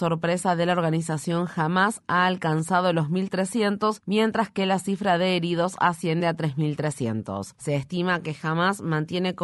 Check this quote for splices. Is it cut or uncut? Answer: uncut